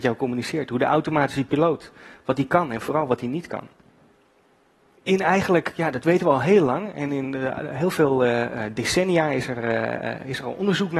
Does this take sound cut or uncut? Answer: uncut